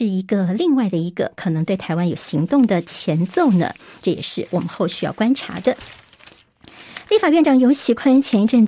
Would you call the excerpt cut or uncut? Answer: uncut